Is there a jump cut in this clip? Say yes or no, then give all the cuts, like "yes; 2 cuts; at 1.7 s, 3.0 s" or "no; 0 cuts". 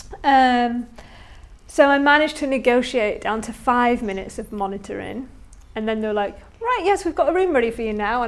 no; 0 cuts